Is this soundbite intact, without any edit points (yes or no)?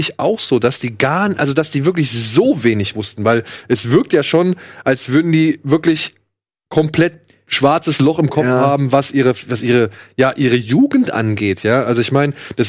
yes